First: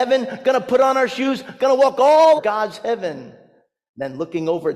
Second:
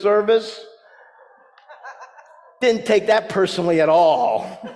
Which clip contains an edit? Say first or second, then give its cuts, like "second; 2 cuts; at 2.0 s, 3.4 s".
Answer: first; 1 cut; at 2.4 s